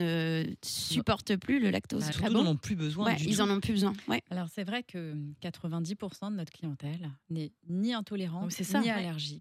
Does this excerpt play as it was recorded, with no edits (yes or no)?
no